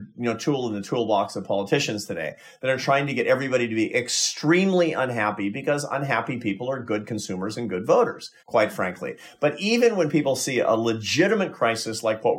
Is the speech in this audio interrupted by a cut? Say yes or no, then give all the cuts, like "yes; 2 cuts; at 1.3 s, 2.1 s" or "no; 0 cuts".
yes; 1 cut; at 8.4 s